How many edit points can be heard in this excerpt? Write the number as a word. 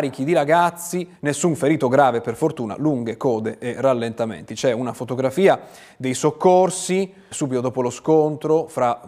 two